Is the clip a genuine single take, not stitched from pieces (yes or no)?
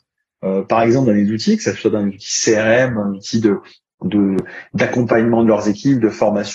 no